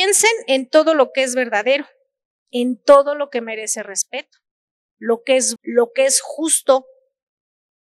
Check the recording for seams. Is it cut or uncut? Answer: cut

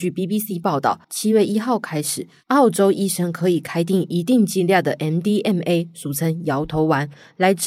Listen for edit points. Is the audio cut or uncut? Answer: cut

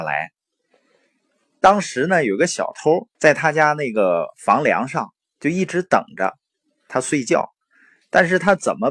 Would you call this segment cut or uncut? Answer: cut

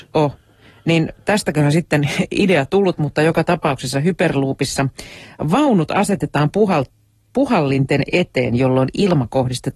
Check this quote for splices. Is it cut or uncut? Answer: uncut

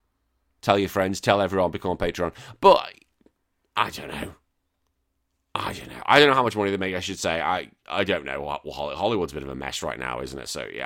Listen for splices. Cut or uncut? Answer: uncut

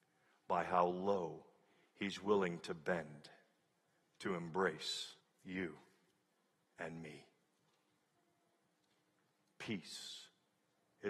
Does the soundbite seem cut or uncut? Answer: cut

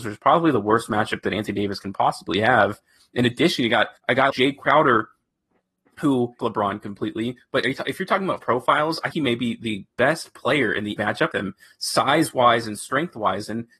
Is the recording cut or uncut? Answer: cut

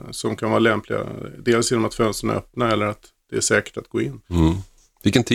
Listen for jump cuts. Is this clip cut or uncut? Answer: cut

